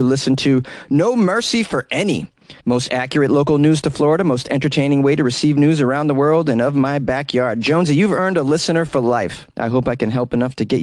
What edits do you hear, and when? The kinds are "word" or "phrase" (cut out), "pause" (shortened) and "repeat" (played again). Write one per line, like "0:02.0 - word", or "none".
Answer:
0:02.6 - pause
0:09.5 - pause